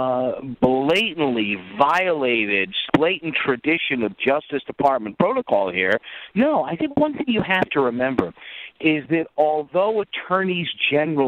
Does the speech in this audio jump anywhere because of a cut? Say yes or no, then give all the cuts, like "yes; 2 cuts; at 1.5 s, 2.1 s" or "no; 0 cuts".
yes; 1 cut; at 2.9 s